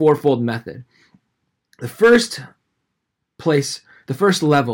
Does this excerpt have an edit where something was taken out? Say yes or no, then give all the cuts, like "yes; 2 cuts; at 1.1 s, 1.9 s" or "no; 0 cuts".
no; 0 cuts